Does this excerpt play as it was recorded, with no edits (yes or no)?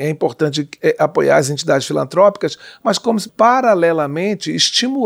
no